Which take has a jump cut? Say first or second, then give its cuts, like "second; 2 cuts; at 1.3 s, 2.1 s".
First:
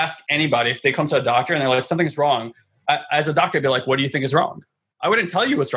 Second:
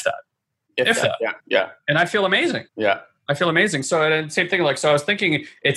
second; 2 cuts; at 1.4 s, 2.7 s